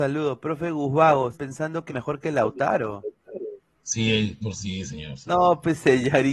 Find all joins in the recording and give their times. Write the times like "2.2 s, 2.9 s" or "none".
1.3 s, 1.9 s, 4.4 s